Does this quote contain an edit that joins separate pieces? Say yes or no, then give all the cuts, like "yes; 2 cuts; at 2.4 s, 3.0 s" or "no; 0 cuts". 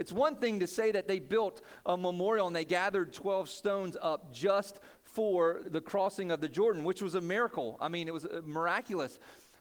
yes; 1 cut; at 5.6 s